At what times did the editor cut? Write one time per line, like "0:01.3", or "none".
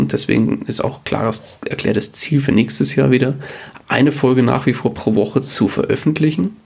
none